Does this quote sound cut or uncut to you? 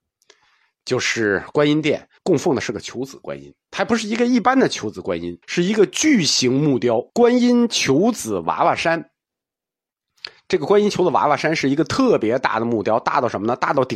cut